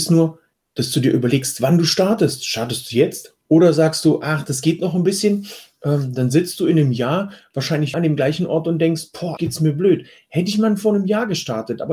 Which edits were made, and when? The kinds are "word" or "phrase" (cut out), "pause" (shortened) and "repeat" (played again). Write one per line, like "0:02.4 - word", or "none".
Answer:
0:03.4 - pause
0:07.9 - word
0:09.4 - word